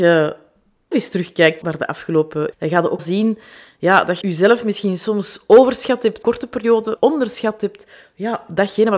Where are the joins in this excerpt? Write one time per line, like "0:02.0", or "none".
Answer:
0:00.9
0:01.6
0:02.5
0:03.0
0:04.2
0:06.2
0:07.0